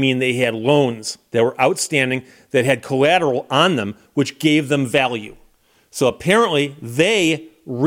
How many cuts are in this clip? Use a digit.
0